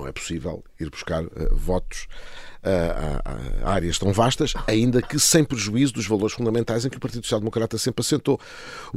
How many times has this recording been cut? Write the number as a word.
zero